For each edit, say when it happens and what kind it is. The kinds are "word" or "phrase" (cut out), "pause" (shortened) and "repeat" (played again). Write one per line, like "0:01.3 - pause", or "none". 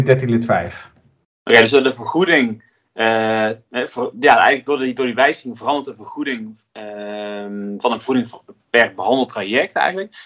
none